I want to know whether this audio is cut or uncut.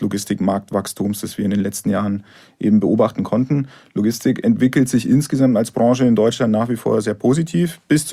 uncut